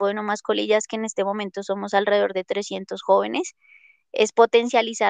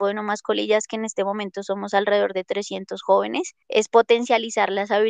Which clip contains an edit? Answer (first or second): second